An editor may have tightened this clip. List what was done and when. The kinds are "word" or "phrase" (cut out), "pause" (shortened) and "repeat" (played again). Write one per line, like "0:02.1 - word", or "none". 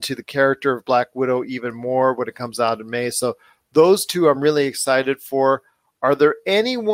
none

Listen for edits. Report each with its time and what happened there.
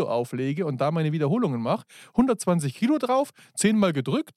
none

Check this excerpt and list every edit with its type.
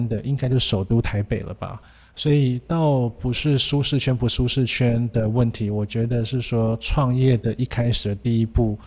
none

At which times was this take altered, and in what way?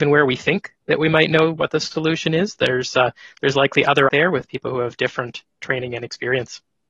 0:04.1 - phrase

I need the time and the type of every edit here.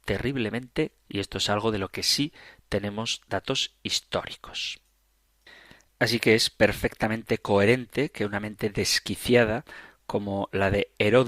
0:01.0 - word

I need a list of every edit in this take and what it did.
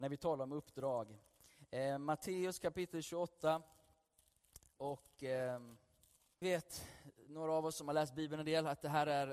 0:06.4 - word

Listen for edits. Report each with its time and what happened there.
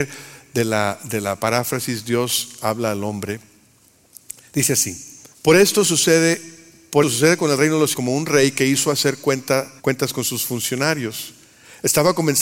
0:05.3 - pause
0:07.0 - word
0:07.9 - word
0:09.8 - pause

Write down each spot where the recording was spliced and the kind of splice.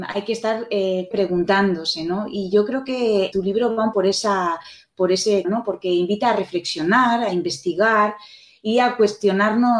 0:01.1 - word
0:03.3 - word
0:03.9 - word
0:05.4 - word

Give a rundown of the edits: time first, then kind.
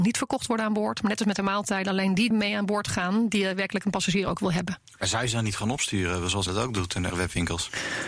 0:02.3 - word
0:06.5 - word
0:07.1 - word

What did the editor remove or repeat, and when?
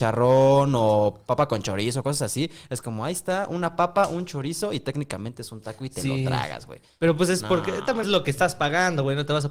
0:08.0 - word

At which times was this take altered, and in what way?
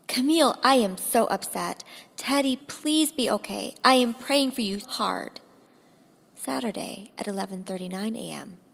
0:02.6 - word
0:04.8 - word

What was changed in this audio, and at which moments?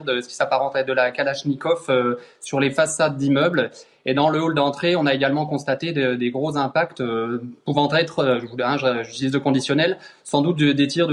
none

